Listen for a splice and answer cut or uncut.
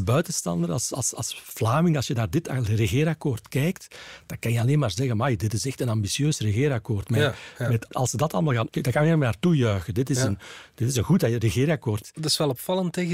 cut